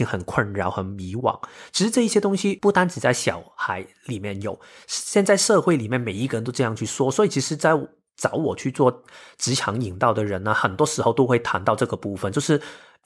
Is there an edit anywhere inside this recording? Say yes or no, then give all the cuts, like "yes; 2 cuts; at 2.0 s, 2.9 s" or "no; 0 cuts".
no; 0 cuts